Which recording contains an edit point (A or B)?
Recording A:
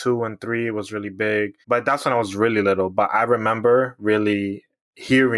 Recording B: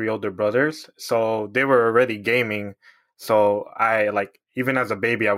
A